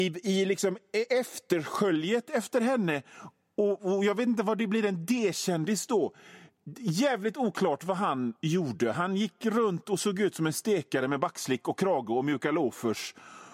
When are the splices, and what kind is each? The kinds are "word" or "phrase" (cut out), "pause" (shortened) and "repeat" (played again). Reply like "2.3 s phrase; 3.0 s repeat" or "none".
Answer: 8.4 s pause

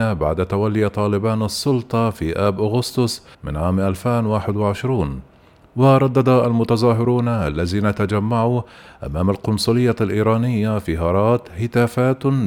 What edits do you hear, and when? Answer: 3.3 s pause

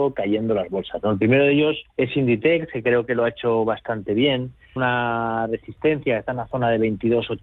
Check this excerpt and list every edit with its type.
1.9 s pause; 4.8 s word

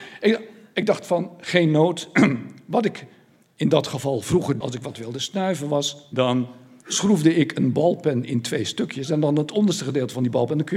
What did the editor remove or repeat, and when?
4.6 s word

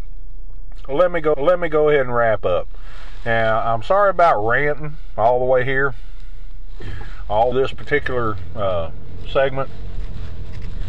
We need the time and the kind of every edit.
1.3 s repeat; 7.5 s phrase

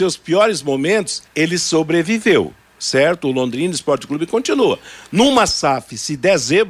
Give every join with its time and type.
1.3 s pause

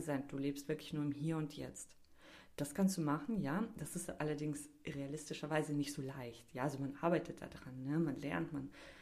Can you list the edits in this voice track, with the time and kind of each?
none

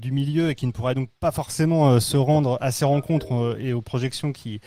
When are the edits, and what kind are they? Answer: none

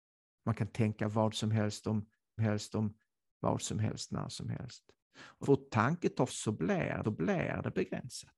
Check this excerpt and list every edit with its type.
2.4 s repeat; 5.4 s word; 6.3 s word; 7.0 s repeat

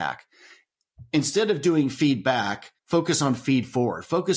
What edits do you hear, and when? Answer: 2.8 s pause

